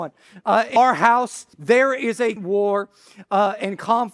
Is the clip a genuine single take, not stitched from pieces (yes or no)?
no